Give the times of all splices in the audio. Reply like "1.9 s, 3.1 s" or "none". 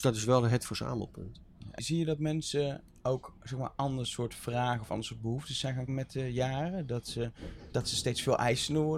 1.8 s, 3.4 s, 5.9 s, 7.7 s